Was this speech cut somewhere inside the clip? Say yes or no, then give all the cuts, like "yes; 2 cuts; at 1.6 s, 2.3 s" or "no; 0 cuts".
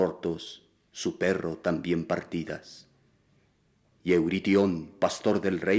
no; 0 cuts